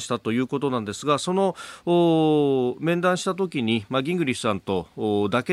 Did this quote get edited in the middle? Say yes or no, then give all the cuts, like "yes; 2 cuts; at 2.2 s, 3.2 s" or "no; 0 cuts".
no; 0 cuts